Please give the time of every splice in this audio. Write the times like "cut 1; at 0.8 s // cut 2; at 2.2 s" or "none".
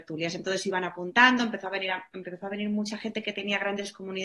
none